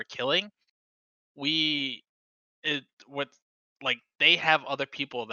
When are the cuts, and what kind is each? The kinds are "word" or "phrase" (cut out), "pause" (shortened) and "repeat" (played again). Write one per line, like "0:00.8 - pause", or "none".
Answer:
none

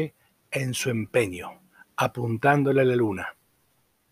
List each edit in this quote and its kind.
none

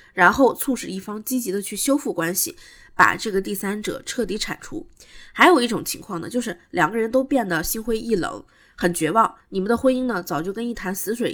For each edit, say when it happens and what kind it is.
0:09.4 - pause

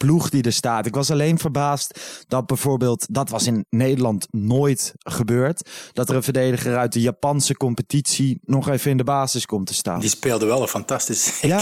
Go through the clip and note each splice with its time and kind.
none

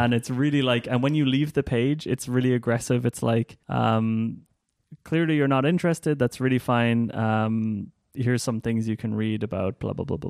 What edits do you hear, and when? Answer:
0:03.6 - pause

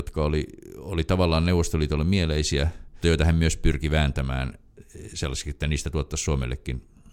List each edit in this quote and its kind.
0:03.0 - word

